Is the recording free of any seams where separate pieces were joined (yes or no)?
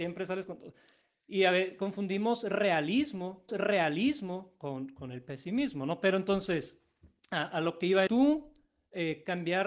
no